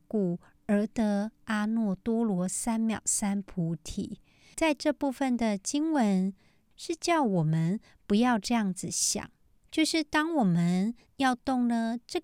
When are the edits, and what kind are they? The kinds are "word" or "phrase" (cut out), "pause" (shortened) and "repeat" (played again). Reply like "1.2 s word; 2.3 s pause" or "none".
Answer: none